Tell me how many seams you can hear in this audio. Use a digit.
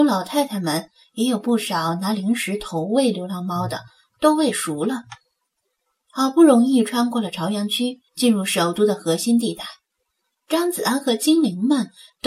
1